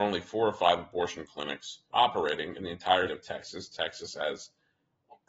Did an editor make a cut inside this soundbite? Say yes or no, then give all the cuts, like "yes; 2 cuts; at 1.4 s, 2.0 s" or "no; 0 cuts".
yes; 2 cuts; at 1.9 s, 3.1 s